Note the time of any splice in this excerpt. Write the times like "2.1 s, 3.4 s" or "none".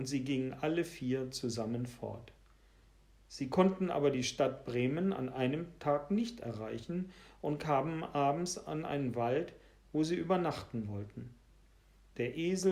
none